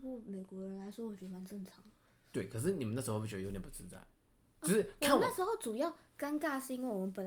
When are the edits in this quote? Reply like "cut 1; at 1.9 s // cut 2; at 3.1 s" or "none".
none